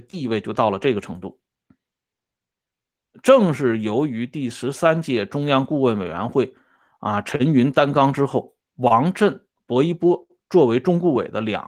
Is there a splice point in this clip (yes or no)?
no